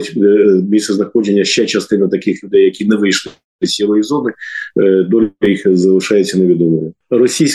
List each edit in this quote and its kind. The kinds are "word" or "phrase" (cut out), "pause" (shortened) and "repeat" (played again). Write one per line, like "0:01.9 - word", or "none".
none